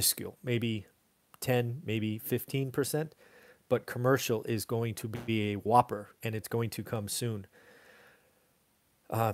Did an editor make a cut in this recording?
no; 0 cuts

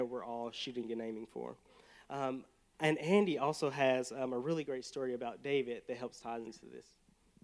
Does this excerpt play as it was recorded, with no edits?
yes; 0 cuts

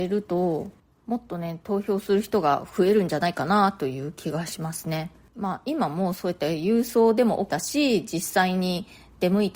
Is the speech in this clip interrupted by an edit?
yes; 1 cut; at 7.5 s

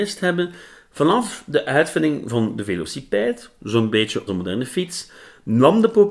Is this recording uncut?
no; 1 cut; at 4.3 s

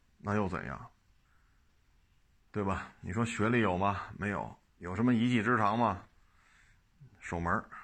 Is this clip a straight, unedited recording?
no; 2 cuts; at 1.2 s, 4.7 s

